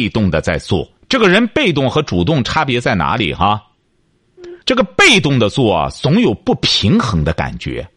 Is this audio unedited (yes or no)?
no